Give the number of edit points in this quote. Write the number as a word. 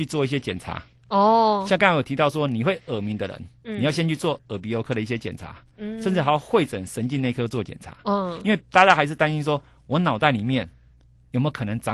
one